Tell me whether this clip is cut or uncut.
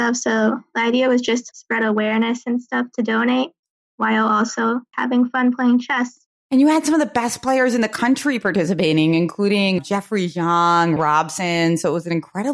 cut